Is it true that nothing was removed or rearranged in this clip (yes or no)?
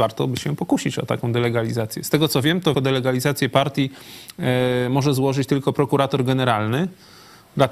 no